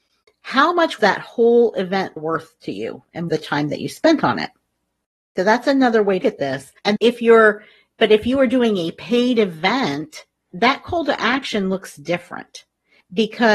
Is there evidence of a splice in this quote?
yes; 6 cuts; at 1.0 s, 2.2 s, 3.3 s, 6.2 s, 7.0 s, 10.5 s

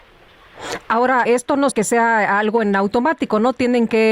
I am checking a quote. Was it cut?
yes; 2 cuts; at 1.3 s, 1.7 s

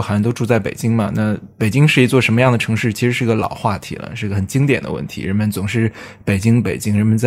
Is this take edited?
yes; 1 cut; at 1.5 s

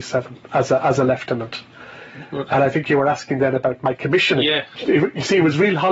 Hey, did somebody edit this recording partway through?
no; 0 cuts

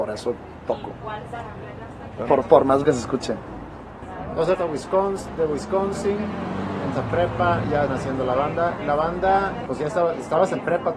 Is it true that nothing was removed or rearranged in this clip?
no; 6 cuts; at 2.4 s, 2.8 s, 4.5 s, 6.9 s, 7.9 s, 9.7 s

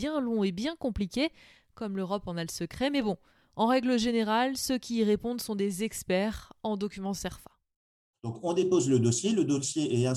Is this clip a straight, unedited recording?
yes; 0 cuts

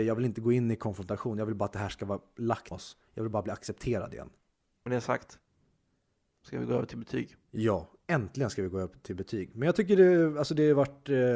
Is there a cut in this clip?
yes; 1 cut; at 2.7 s

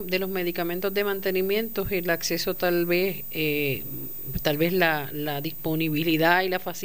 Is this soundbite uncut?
yes; 0 cuts

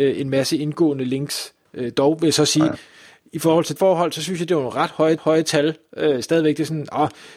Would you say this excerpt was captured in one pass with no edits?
no; 2 cuts; at 3.8 s, 5.2 s

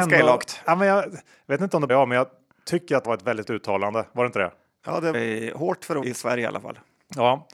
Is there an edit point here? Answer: yes; 5 cuts; at 1.9 s, 3.0 s, 3.4 s, 5.1 s, 6.0 s

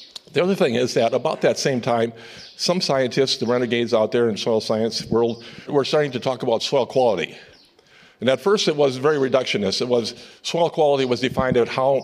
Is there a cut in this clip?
yes; 1 cut; at 5.7 s

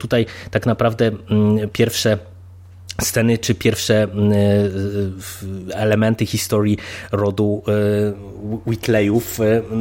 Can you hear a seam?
no; 0 cuts

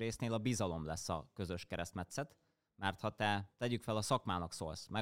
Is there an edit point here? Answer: no; 0 cuts

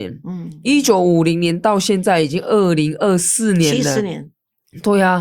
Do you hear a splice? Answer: no; 0 cuts

